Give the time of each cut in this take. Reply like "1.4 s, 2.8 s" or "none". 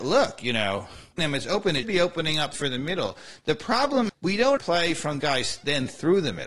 1.2 s, 1.8 s, 2.5 s, 4.1 s, 4.6 s, 5.2 s